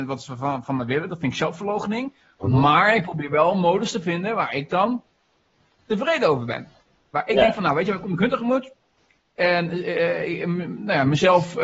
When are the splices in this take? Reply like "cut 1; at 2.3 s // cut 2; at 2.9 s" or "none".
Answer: none

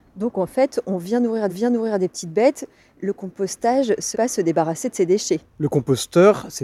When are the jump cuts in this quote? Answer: cut 1; at 1.5 s // cut 2; at 4.1 s // cut 3; at 5.5 s

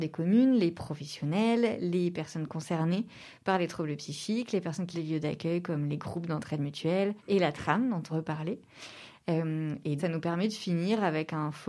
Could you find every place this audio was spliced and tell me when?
cut 1; at 4.9 s // cut 2; at 7.2 s // cut 3; at 8.1 s // cut 4; at 10.0 s

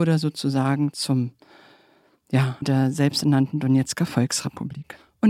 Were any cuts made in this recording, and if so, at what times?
cut 1; at 2.6 s

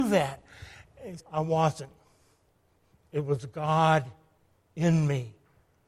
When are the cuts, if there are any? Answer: cut 1; at 1.2 s

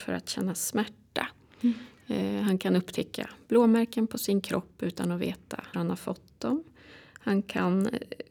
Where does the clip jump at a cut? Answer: cut 1; at 5.7 s

